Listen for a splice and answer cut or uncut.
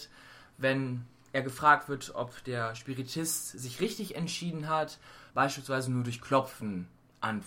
cut